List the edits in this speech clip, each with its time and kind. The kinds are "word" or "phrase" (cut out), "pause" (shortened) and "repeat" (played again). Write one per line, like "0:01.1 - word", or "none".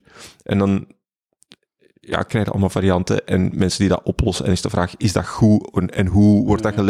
none

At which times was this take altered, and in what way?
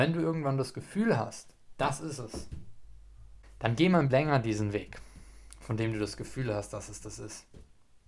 0:04.1 - word

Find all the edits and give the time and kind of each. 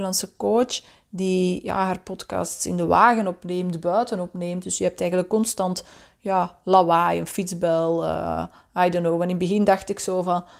none

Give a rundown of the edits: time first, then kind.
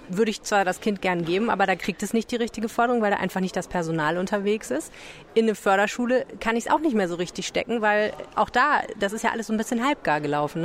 none

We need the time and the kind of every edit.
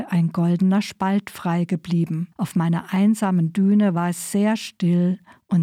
0:02.3 - pause

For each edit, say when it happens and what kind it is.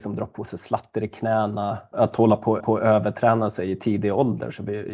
0:01.9 - word
0:02.6 - repeat

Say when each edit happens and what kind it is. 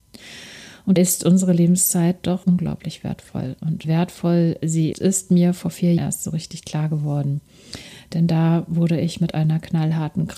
0:01.0 - word
0:02.4 - word
0:03.8 - word
0:04.9 - word
0:06.0 - word

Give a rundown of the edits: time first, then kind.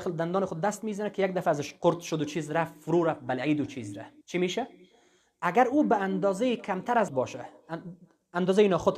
0:04.2 - pause
0:07.1 - word

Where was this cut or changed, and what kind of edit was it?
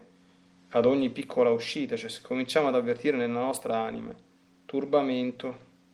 none

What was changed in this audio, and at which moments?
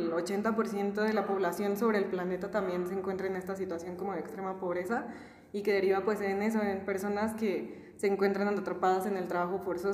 none

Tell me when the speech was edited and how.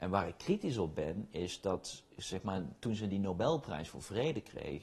none

